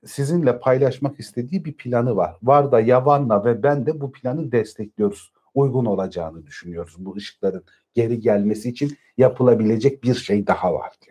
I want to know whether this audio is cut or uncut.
uncut